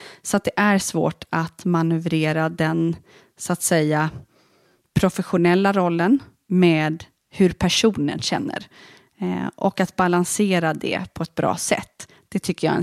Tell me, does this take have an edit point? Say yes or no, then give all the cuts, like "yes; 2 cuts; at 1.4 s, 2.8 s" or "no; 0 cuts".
no; 0 cuts